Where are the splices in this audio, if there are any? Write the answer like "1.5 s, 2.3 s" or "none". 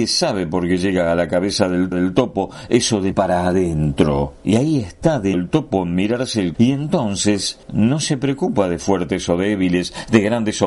1.9 s, 3.1 s, 4.4 s, 5.3 s, 6.5 s, 7.6 s